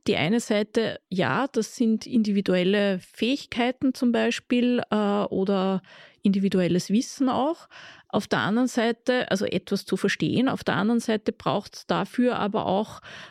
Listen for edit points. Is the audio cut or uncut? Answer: uncut